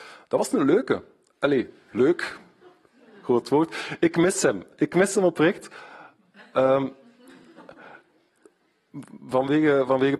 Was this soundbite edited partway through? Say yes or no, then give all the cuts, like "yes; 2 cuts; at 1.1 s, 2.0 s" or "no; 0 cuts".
no; 0 cuts